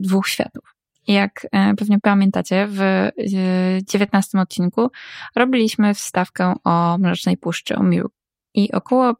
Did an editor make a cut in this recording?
no; 0 cuts

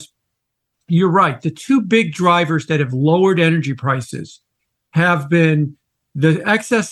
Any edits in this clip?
no; 0 cuts

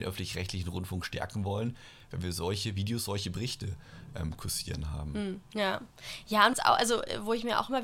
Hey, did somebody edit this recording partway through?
yes; 2 cuts; at 5.5 s, 6.5 s

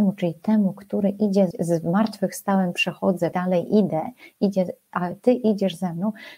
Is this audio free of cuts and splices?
no; 2 cuts; at 1.5 s, 3.3 s

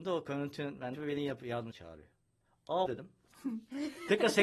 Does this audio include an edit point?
yes; 3 cuts; at 0.9 s, 1.7 s, 2.9 s

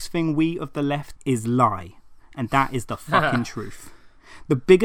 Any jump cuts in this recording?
yes; 1 cut; at 1.2 s

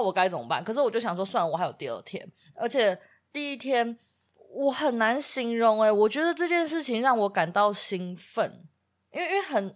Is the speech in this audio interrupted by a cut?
no; 0 cuts

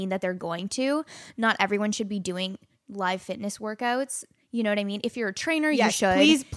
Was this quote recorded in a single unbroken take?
yes; 0 cuts

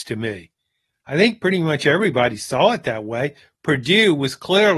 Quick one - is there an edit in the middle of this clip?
no; 0 cuts

